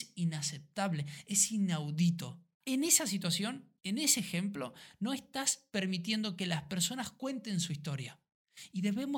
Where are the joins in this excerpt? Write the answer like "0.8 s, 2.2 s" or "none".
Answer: 2.5 s, 3.8 s